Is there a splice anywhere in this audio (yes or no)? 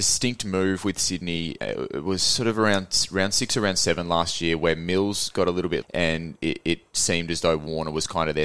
yes